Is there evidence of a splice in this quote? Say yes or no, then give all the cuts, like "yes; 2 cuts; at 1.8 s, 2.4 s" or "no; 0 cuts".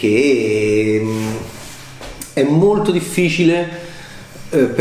no; 0 cuts